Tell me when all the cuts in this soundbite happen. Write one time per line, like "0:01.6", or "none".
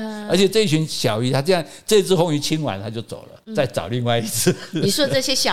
0:03.4

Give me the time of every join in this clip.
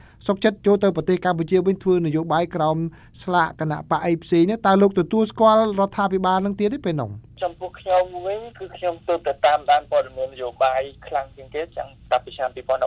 0:09.0

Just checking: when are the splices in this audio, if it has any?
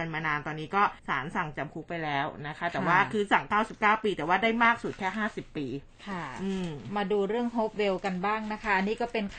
0:01.0

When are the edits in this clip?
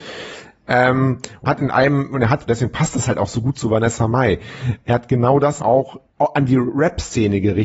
0:01.5
0:02.5
0:05.6
0:06.1

